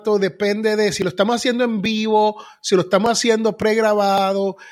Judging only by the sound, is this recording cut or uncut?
uncut